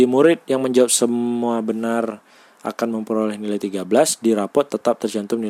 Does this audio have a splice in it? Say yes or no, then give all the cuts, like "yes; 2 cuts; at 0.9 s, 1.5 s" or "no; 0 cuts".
no; 0 cuts